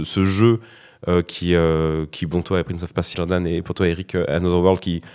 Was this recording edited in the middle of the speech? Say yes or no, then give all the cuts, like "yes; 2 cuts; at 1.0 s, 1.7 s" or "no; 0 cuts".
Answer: yes; 2 cuts; at 2.4 s, 3.1 s